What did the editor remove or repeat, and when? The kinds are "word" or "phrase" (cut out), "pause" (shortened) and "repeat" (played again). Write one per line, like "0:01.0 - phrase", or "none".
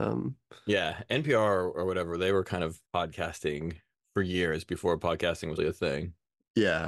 0:02.9 - pause
0:05.6 - word